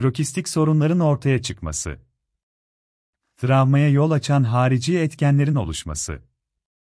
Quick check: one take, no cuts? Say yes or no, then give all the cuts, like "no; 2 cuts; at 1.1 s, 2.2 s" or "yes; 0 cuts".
yes; 0 cuts